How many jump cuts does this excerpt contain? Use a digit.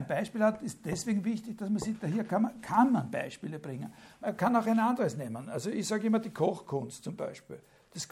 0